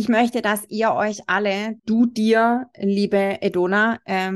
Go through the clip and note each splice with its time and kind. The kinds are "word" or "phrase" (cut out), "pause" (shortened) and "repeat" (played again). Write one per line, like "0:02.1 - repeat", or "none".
0:01.8 - pause